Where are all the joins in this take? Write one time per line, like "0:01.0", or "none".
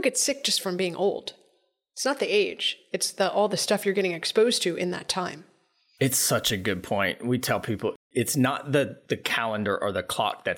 none